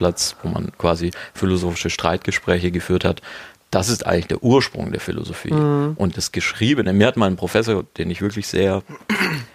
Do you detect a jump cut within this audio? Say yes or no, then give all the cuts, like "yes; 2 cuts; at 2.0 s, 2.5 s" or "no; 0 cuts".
no; 0 cuts